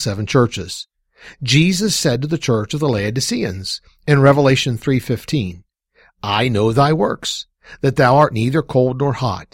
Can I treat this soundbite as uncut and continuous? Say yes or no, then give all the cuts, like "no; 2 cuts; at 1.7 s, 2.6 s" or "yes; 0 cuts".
yes; 0 cuts